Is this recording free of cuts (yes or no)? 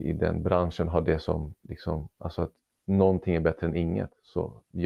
yes